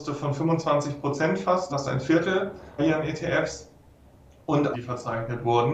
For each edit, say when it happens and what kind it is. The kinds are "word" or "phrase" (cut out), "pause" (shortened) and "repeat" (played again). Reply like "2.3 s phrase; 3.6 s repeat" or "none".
1.7 s word; 2.8 s word; 4.7 s phrase